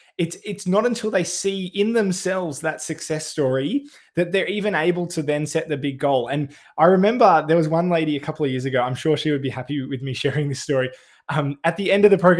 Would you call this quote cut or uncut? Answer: uncut